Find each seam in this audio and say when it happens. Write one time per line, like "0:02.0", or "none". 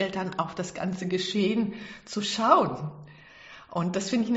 none